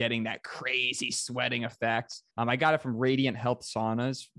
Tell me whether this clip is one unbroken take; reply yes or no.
no